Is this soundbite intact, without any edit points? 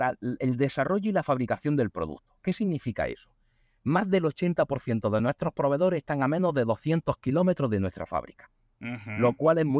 yes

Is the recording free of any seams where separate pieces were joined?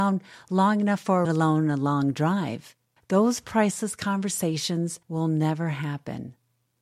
no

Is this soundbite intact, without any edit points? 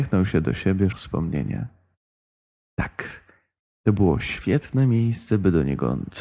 no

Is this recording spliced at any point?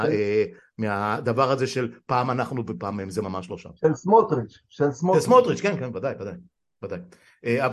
no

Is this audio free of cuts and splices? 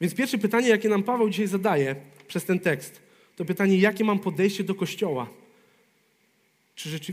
yes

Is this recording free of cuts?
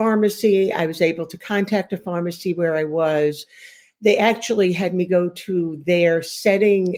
yes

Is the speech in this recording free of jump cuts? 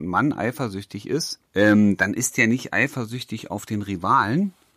no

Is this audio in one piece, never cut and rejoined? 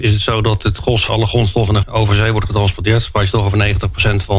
no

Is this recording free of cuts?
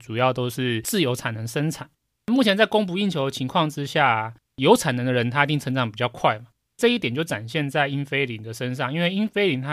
yes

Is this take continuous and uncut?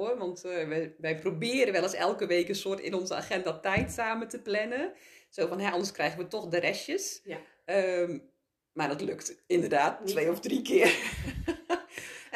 yes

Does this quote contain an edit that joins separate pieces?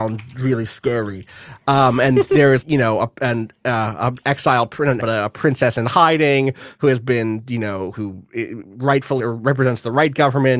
yes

